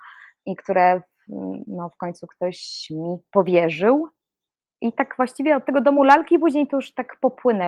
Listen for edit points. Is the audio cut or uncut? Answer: uncut